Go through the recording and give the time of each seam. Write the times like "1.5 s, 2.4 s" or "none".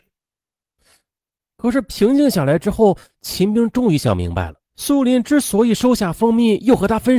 4.7 s